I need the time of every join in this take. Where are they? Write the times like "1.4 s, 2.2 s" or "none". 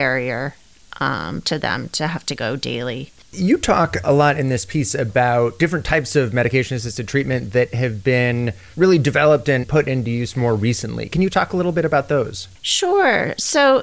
3.2 s, 12.6 s